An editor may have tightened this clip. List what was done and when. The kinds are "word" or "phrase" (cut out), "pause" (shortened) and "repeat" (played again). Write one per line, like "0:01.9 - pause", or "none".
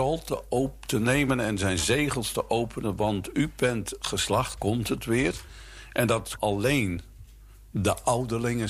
0:04.6 - word
0:06.4 - word